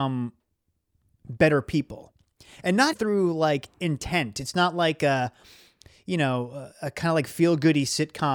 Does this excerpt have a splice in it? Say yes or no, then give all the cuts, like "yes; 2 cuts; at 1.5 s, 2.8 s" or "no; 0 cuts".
yes; 1 cut; at 2.9 s